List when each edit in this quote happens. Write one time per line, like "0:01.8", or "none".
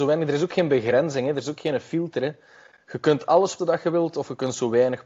0:03.6